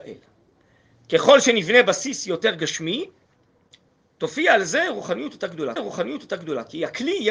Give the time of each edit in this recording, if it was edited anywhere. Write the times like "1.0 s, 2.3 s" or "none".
5.8 s